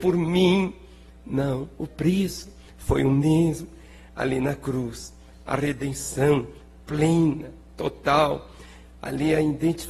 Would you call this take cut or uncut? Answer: uncut